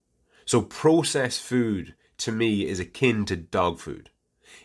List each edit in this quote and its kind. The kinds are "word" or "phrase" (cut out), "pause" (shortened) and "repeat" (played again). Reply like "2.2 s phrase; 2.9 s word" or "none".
none